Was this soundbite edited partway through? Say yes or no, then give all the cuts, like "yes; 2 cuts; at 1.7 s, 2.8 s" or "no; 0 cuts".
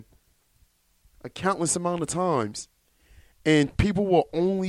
no; 0 cuts